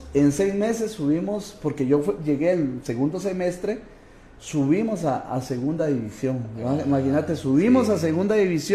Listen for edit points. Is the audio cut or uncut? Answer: uncut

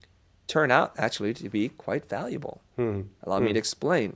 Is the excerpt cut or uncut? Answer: uncut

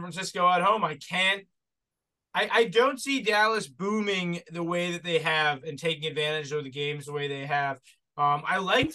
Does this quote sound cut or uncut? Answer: uncut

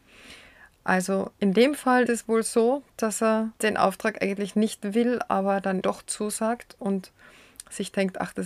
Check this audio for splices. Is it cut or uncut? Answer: cut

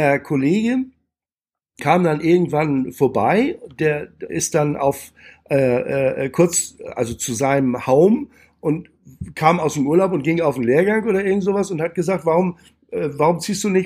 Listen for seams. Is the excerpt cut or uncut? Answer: cut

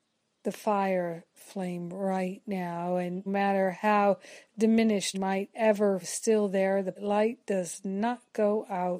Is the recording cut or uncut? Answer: cut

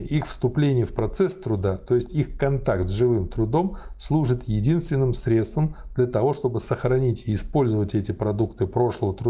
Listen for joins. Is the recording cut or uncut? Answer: uncut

